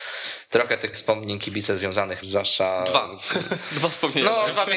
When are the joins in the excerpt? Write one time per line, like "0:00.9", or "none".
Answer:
0:00.9
0:02.2